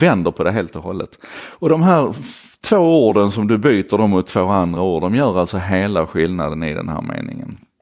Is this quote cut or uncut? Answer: uncut